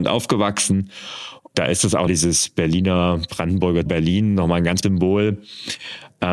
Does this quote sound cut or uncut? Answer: cut